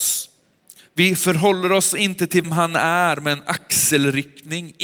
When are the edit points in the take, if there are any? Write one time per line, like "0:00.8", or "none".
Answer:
0:02.4